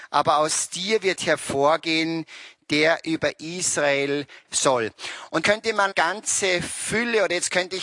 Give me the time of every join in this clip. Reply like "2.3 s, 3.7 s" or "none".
4.4 s, 5.4 s, 5.9 s